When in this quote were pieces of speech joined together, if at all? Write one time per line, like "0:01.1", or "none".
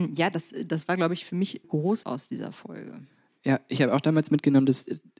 0:01.6
0:02.0